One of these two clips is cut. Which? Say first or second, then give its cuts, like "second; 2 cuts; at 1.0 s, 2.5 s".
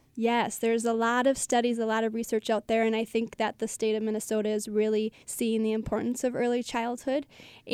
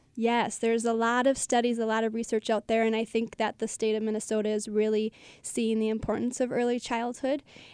first; 1 cut; at 5.2 s